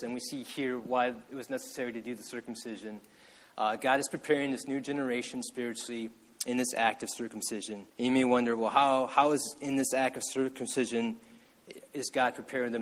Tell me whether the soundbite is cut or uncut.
cut